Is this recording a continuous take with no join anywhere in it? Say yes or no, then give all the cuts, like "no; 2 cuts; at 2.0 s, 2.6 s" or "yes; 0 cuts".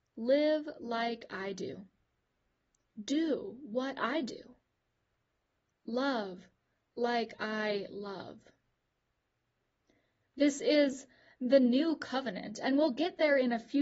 yes; 0 cuts